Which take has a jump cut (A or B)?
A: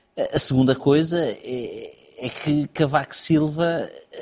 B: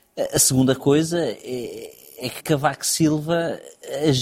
B